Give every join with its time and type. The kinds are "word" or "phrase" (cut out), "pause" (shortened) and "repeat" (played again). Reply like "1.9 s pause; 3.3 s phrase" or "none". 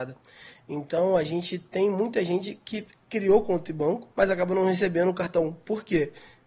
4.1 s pause

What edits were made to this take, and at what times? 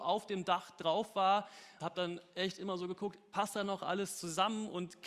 1.8 s word

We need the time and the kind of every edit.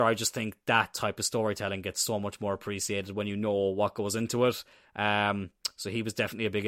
none

